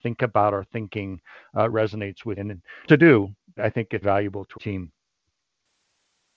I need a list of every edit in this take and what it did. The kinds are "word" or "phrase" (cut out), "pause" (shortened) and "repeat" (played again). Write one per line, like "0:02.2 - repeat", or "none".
0:01.7 - word
0:02.4 - word
0:02.9 - word
0:03.6 - word
0:04.0 - word
0:04.5 - word